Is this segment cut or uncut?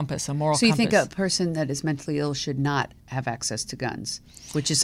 cut